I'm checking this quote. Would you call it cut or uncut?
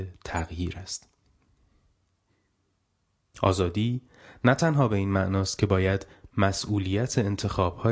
uncut